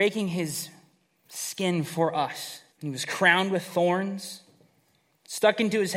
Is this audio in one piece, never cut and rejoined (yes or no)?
no